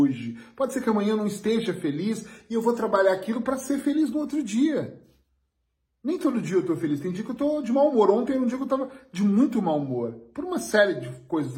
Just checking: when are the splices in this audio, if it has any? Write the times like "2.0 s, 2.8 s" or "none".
none